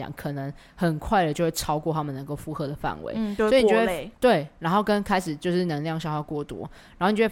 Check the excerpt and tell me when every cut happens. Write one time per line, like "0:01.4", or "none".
0:04.1